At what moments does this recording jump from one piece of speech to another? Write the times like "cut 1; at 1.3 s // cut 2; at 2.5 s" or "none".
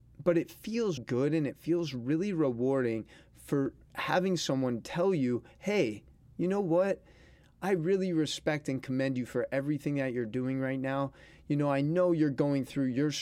cut 1; at 1.0 s